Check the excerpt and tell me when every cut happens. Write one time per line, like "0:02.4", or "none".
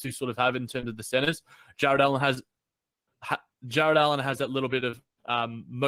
none